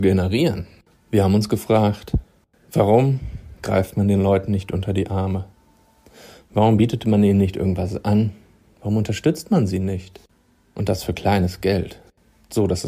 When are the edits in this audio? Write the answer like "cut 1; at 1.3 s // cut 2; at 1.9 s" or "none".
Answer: none